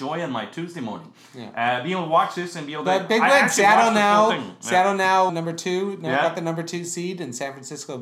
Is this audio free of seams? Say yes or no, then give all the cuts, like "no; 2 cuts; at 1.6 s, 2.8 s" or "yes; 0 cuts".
no; 1 cut; at 5.3 s